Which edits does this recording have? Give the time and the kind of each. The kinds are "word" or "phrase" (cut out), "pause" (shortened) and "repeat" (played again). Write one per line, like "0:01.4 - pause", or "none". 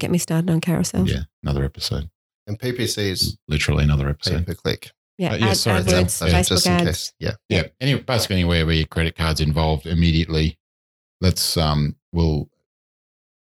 none